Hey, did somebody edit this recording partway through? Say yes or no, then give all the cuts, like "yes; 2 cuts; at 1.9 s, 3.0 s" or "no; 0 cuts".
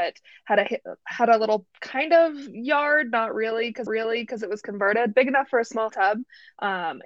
yes; 4 cuts; at 1.7 s, 3.9 s, 5.1 s, 5.9 s